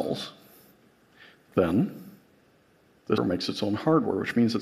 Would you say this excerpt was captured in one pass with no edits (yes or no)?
no